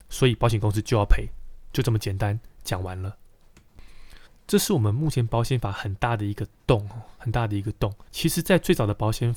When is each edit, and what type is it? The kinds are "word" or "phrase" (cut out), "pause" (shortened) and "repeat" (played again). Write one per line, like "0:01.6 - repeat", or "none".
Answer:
0:04.3 - pause
0:08.1 - pause